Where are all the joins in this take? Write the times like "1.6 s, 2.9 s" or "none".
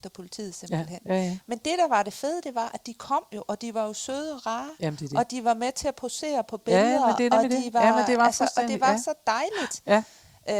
none